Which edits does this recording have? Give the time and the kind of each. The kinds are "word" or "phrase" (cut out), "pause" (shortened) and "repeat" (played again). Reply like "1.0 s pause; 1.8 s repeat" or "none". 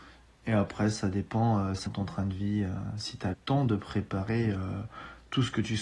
1.9 s word; 3.3 s word